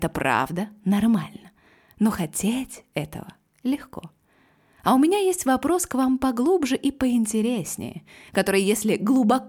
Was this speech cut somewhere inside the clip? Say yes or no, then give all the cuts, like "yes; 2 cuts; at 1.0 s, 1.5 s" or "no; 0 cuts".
no; 0 cuts